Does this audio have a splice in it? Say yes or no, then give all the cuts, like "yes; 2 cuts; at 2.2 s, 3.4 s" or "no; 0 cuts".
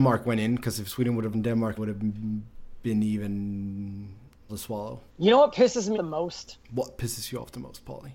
yes; 6 cuts; at 1.3 s, 1.8 s, 4.5 s, 5.1 s, 5.9 s, 6.6 s